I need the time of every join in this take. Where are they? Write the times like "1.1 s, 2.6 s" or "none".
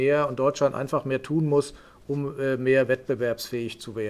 none